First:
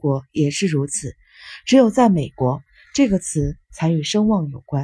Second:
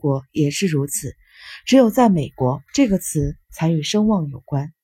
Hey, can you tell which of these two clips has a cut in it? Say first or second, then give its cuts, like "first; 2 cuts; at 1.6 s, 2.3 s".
second; 1 cut; at 2.7 s